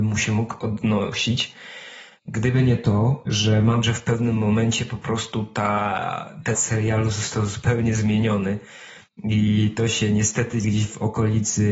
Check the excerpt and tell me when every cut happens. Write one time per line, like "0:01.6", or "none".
0:03.8
0:06.5
0:10.6